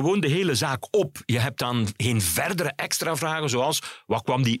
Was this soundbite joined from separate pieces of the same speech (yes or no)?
no